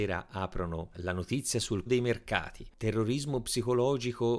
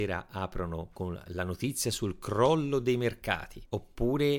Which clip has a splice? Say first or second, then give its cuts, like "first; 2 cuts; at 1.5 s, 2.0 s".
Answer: first; 3 cuts; at 0.9 s, 1.9 s, 2.7 s